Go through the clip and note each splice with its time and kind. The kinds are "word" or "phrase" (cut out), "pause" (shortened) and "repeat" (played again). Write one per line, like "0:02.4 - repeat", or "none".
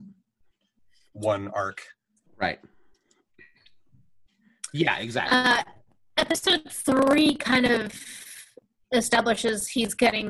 none

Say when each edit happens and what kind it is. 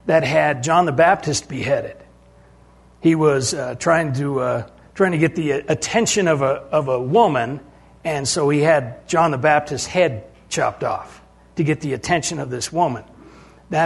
none

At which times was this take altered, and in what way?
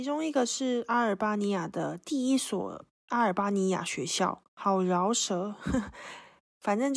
0:04.4 - pause

